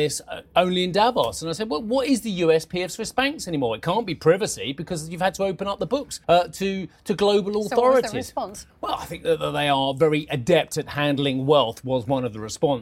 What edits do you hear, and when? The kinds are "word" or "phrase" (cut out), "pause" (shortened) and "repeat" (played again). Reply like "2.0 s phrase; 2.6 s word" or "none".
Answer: 6.2 s pause; 8.7 s pause